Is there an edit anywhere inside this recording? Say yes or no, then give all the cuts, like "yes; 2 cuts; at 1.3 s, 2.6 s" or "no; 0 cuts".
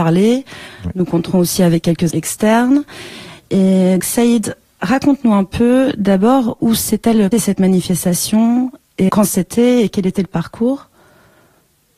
yes; 4 cuts; at 2.1 s, 4.0 s, 7.3 s, 9.1 s